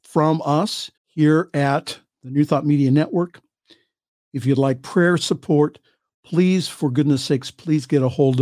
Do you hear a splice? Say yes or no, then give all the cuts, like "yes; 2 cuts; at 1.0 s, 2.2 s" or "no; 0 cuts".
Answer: yes; 1 cut; at 1.0 s